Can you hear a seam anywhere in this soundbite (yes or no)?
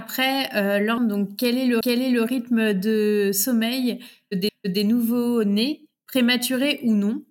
yes